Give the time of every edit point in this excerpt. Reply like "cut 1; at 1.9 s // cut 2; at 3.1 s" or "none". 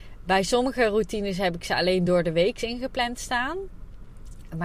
none